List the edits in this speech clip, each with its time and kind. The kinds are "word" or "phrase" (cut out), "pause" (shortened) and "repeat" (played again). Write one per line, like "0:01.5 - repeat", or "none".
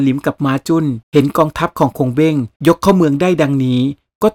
0:01.0 - pause
0:02.6 - pause